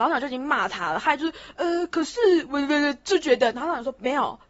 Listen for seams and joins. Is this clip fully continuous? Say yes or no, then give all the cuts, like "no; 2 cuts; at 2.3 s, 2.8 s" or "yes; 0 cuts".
yes; 0 cuts